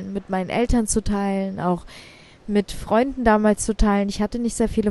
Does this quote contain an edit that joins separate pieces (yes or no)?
no